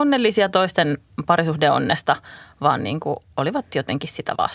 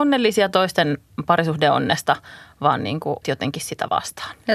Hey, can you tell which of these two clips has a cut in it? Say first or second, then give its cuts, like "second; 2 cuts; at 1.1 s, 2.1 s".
second; 1 cut; at 3.2 s